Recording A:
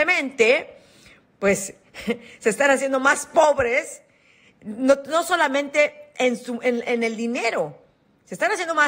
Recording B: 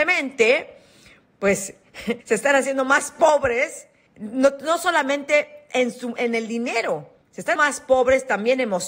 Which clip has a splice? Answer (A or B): B